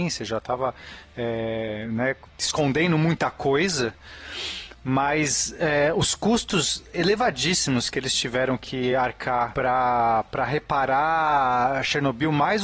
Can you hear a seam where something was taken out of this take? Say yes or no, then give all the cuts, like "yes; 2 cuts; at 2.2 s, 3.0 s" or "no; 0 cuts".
no; 0 cuts